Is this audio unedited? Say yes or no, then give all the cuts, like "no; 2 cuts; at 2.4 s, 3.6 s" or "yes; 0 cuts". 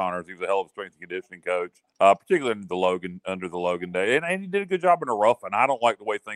no; 1 cut; at 1.9 s